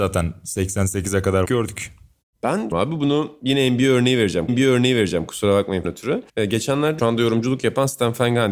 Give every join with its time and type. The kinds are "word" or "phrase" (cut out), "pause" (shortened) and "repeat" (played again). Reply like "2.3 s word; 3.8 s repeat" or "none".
1.5 s phrase; 2.7 s phrase; 4.5 s repeat; 5.8 s phrase; 6.3 s pause; 7.0 s phrase